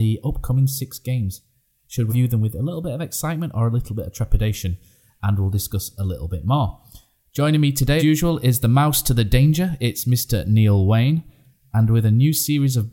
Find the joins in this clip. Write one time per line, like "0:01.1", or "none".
0:02.1
0:08.0

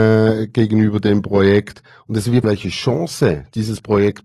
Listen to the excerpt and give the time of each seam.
0:02.4

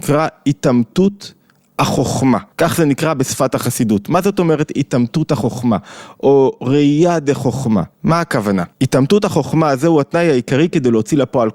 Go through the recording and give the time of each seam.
0:02.5
0:07.9
0:08.7

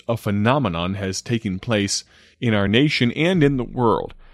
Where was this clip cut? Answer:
none

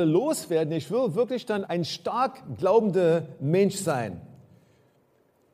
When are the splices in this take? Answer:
0:01.6

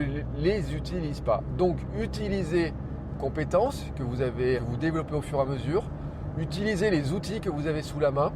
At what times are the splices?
0:03.1
0:04.6

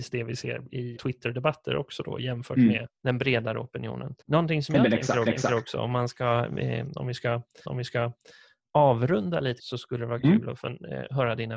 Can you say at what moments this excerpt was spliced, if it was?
0:01.0
0:03.0
0:04.2
0:05.3
0:07.6
0:09.6

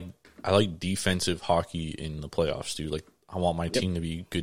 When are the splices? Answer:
none

